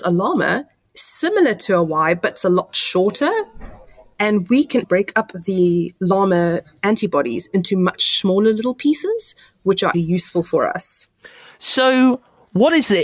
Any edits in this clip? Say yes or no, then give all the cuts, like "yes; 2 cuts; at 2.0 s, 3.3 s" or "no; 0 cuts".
yes; 2 cuts; at 4.8 s, 9.9 s